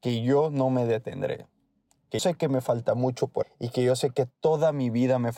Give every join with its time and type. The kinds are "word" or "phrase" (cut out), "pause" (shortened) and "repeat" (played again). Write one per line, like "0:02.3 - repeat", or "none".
0:02.2 - word
0:03.4 - word